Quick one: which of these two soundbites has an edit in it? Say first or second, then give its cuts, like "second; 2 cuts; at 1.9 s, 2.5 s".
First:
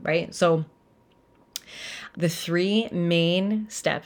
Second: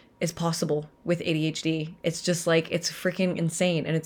first; 1 cut; at 2.1 s